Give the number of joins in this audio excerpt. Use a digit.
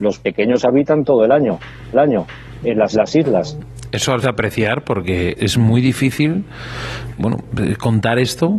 5